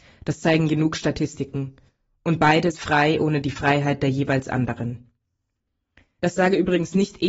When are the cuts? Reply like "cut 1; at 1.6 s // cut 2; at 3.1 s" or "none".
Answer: cut 1; at 2.7 s